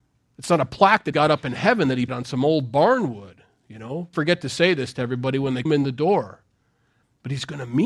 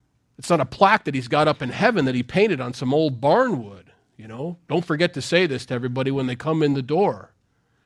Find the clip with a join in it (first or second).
first